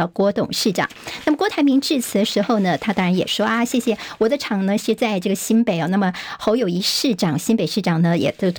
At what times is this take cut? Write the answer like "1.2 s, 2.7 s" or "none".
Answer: none